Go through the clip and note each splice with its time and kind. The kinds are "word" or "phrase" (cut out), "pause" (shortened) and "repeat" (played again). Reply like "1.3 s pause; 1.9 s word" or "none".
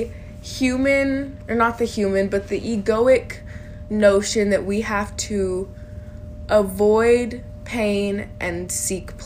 none